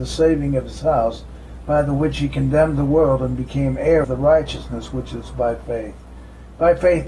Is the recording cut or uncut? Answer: cut